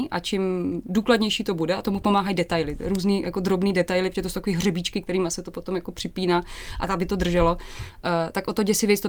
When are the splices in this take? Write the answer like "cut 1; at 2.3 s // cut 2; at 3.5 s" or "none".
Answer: none